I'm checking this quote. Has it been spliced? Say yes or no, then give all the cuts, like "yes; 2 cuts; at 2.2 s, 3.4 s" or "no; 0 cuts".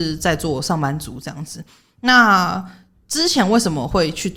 no; 0 cuts